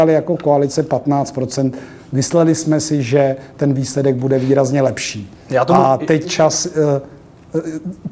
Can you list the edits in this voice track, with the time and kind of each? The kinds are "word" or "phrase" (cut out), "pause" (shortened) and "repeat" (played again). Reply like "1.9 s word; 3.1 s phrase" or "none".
6.2 s word